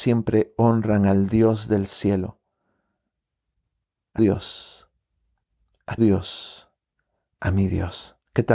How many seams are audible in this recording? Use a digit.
2